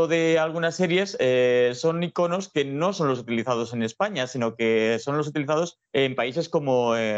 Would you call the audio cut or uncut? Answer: cut